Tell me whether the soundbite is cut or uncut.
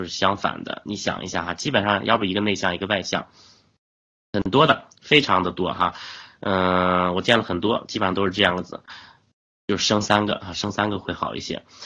uncut